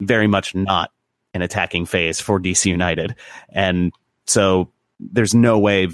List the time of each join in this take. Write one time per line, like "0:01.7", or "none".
none